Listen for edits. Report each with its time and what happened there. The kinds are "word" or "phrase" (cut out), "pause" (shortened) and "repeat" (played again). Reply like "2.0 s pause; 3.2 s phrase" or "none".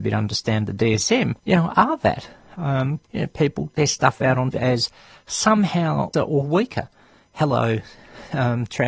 1.4 s pause; 3.1 s pause; 3.7 s word; 4.5 s phrase; 6.1 s word